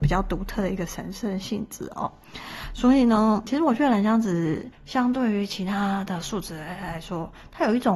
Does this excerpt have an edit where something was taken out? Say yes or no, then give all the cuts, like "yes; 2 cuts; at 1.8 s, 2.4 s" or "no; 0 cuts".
yes; 2 cuts; at 3.4 s, 4.7 s